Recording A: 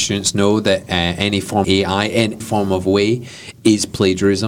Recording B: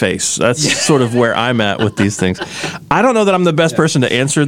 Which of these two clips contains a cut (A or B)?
A